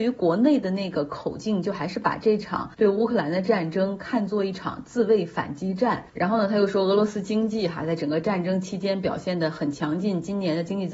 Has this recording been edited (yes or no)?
yes